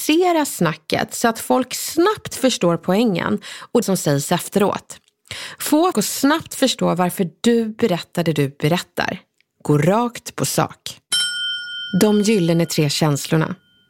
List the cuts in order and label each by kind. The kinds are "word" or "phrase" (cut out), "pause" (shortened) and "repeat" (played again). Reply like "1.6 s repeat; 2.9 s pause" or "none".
3.8 s word; 5.9 s word